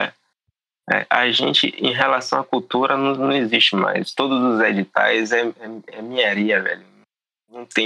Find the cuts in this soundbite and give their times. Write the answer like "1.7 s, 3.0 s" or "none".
none